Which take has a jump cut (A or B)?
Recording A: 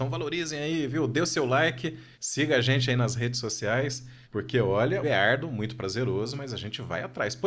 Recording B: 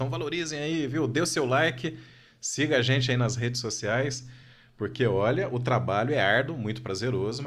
A